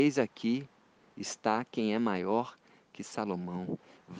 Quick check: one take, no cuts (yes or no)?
yes